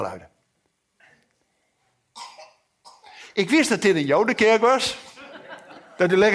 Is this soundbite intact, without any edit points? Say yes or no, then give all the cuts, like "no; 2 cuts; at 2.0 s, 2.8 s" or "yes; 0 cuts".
yes; 0 cuts